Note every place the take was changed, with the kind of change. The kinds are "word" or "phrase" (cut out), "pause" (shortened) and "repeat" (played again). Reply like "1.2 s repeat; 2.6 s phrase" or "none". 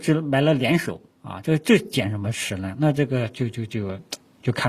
1.1 s pause